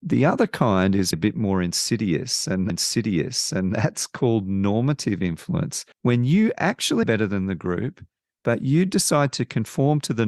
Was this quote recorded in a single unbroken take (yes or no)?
no